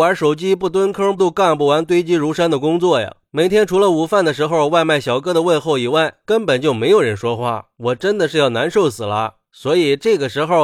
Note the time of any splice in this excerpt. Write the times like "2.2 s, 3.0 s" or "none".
1.2 s